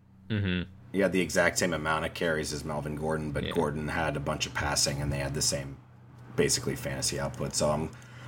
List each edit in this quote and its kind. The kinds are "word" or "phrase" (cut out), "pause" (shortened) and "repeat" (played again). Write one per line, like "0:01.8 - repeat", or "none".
none